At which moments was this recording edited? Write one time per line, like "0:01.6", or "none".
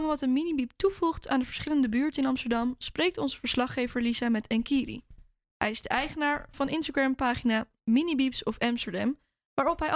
none